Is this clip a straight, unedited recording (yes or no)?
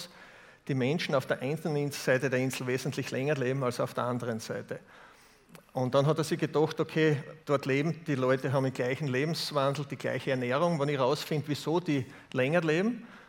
no